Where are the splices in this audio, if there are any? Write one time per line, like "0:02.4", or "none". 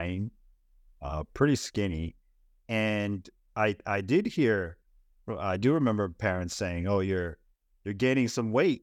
none